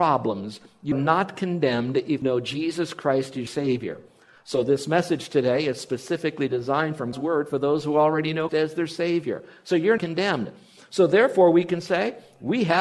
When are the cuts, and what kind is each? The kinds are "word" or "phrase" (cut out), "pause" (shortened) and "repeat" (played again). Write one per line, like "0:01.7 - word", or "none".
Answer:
0:00.9 - word
0:02.2 - word
0:03.5 - word
0:07.1 - word
0:08.5 - word
0:10.0 - word